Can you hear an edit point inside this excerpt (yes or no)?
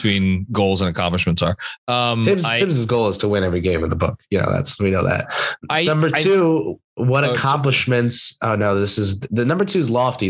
no